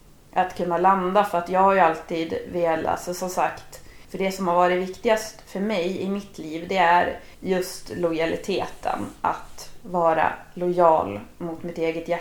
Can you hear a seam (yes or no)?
yes